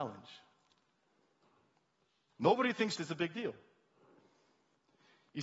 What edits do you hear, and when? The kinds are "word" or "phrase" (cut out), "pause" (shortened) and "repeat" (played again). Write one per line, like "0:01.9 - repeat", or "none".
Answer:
0:03.0 - word